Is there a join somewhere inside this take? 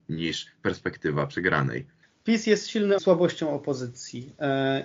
yes; 1 cut; at 3.0 s

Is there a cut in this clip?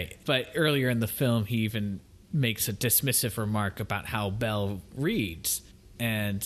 no; 0 cuts

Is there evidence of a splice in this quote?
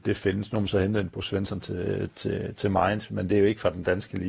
no; 0 cuts

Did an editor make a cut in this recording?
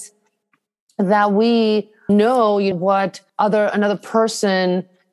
yes; 3 cuts; at 2.1 s, 2.7 s, 3.3 s

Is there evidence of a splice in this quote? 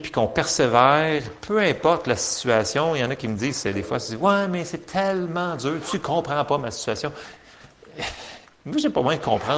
no; 0 cuts

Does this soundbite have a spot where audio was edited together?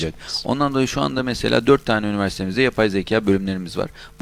no; 0 cuts

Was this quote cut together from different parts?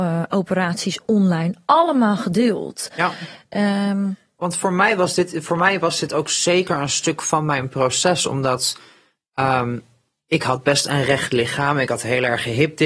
no; 0 cuts

